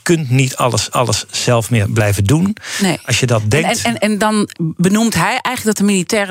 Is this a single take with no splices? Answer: no; 2 cuts; at 0.9 s, 4.5 s

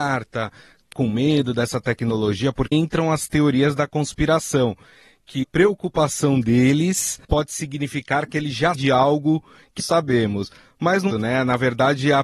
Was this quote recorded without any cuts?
no; 7 cuts; at 0.9 s, 2.7 s, 5.4 s, 7.2 s, 8.7 s, 9.8 s, 11.1 s

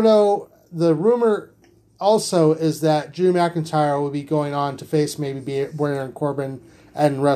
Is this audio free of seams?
yes; 0 cuts

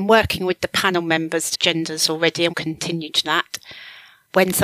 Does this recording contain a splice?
yes; 3 cuts; at 1.5 s, 2.5 s, 3.2 s

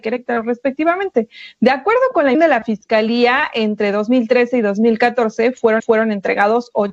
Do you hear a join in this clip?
yes; 2 cuts; at 2.3 s, 5.8 s

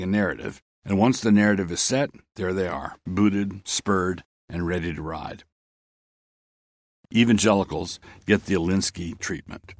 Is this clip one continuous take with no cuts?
yes; 0 cuts

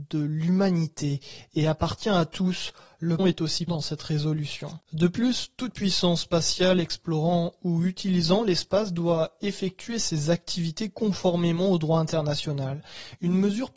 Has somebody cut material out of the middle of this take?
yes; 3 cuts; at 3.2 s, 3.7 s, 4.8 s

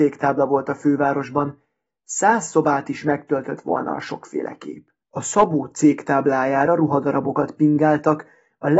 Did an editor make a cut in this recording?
yes; 1 cut; at 5.0 s

